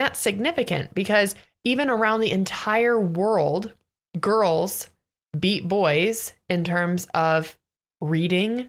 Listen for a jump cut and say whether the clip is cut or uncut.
uncut